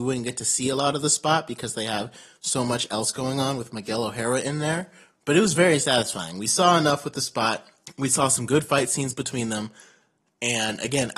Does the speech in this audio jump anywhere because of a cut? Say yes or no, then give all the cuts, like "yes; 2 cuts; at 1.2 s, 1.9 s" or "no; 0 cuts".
no; 0 cuts